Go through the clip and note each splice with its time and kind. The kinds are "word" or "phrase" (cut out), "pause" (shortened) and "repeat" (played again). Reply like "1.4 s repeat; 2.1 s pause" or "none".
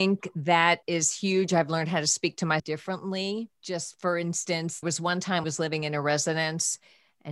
2.6 s word; 3.5 s pause; 4.8 s word; 5.4 s phrase